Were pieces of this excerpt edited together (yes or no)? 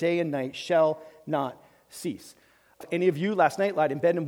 yes